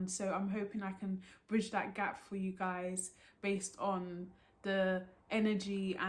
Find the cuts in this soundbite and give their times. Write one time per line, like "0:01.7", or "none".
none